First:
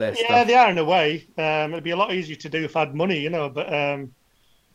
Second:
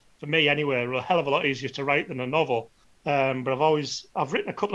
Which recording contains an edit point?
second; 1 cut; at 2.8 s

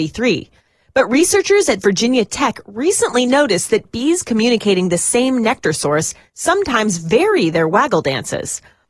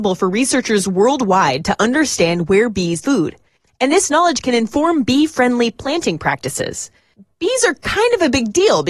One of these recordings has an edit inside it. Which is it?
second; 1 cut; at 3.0 s

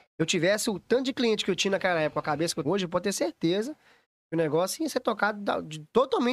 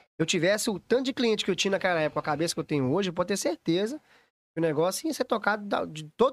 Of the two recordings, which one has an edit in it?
first; 1 cut; at 2.6 s

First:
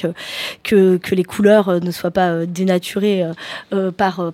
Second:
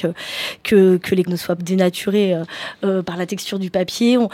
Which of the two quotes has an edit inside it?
second; 3 cuts; at 1.3 s, 1.6 s, 3.0 s

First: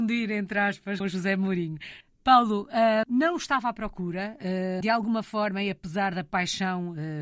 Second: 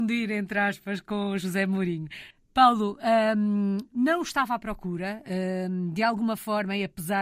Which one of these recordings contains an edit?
first; 3 cuts; at 1.0 s, 3.0 s, 4.8 s

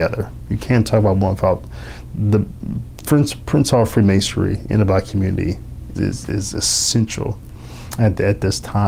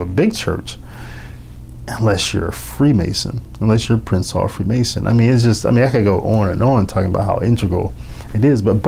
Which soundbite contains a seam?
first; 1 cut; at 5.9 s

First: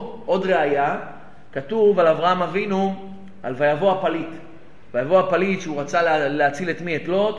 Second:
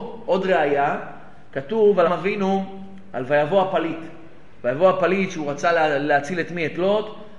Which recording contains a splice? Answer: second; 1 cut; at 2.0 s

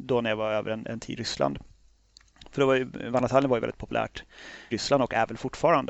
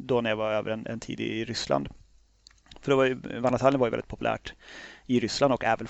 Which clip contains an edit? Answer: first; 2 cuts; at 1.2 s, 4.7 s

